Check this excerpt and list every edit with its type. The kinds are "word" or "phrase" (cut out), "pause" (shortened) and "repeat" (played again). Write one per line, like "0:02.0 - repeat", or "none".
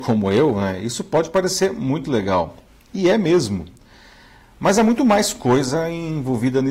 none